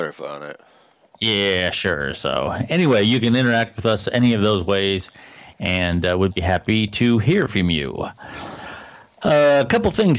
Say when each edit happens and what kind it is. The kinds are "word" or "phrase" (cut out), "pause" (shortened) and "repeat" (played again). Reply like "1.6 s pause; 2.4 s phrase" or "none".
none